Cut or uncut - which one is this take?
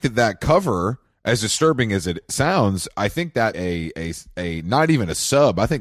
cut